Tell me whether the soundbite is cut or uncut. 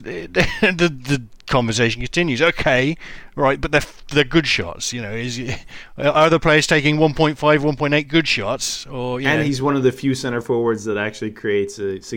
uncut